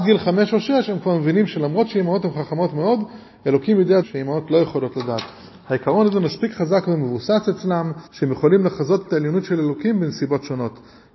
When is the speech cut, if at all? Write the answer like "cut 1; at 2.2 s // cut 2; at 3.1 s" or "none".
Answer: cut 1; at 4.0 s // cut 2; at 8.1 s